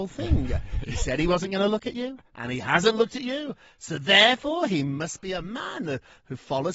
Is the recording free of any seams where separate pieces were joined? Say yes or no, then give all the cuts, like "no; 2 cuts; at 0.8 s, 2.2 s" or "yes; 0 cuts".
yes; 0 cuts